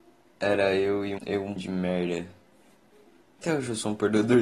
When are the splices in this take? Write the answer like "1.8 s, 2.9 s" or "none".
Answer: 1.2 s, 1.6 s